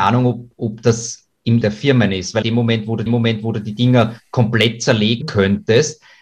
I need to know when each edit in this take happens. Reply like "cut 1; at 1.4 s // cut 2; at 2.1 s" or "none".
cut 1; at 1.6 s // cut 2; at 2.4 s // cut 3; at 3.1 s // cut 4; at 5.2 s